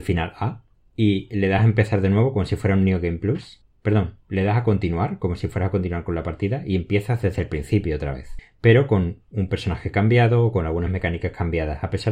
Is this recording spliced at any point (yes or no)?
no